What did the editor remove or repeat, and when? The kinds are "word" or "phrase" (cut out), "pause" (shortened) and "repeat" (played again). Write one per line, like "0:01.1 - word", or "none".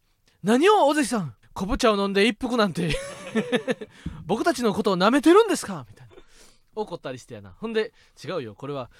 0:01.4 - pause